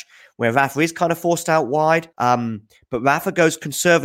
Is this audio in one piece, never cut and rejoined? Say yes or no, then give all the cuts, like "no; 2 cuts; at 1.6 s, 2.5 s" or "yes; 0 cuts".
no; 1 cut; at 2.1 s